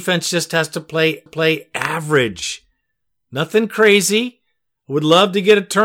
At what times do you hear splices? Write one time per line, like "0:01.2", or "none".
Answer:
0:01.3